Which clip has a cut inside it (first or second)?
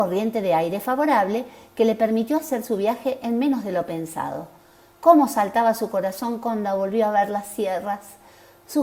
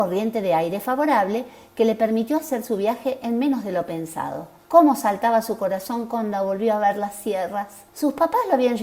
second